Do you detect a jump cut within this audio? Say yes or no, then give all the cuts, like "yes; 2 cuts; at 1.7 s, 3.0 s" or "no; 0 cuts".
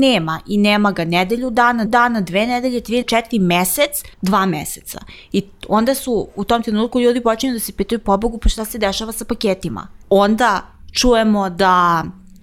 yes; 4 cuts; at 1.9 s, 3.0 s, 4.1 s, 10.0 s